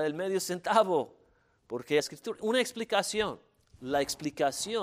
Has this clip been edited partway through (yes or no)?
yes